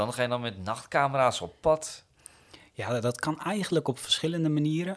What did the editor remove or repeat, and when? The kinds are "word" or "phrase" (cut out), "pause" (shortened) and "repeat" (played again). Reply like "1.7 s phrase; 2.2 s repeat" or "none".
none